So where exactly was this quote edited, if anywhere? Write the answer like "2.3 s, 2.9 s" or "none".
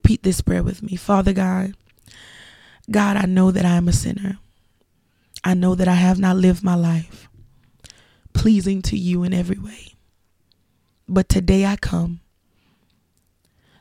none